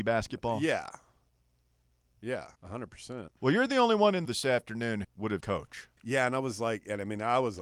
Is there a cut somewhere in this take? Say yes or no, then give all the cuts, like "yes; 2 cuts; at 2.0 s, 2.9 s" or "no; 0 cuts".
yes; 6 cuts; at 2.6 s, 3.4 s, 4.2 s, 5.0 s, 5.4 s, 6.0 s